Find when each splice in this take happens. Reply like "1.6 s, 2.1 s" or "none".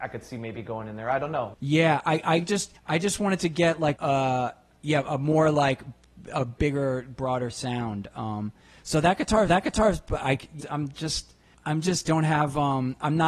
2.8 s, 4.0 s, 9.5 s, 10.6 s, 11.5 s, 12.1 s